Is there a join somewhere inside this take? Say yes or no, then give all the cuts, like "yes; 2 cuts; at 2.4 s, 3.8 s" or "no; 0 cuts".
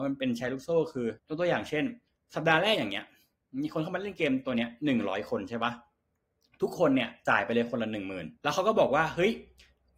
yes; 3 cuts; at 1.2 s, 2.1 s, 8.4 s